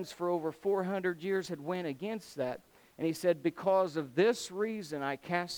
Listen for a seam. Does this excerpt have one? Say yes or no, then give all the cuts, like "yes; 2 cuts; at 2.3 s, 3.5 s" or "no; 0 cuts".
no; 0 cuts